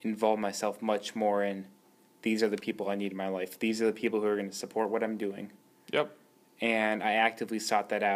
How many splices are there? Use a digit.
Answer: 0